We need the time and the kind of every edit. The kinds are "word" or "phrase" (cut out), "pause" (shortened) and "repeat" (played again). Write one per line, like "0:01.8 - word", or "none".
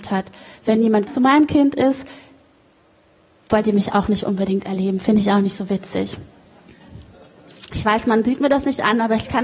0:01.1 - word